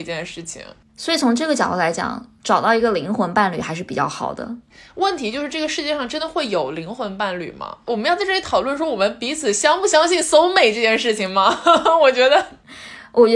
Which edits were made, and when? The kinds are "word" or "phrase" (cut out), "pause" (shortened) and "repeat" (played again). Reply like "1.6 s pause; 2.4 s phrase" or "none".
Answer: none